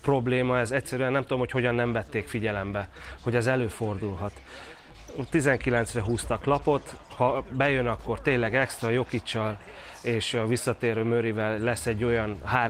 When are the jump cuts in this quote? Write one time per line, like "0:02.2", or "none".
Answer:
none